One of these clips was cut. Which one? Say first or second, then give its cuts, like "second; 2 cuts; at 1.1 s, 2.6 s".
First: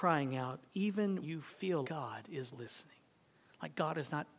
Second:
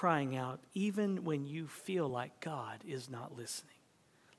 first; 3 cuts; at 1.2 s, 1.8 s, 2.5 s